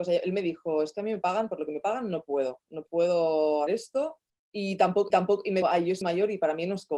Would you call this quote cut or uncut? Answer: cut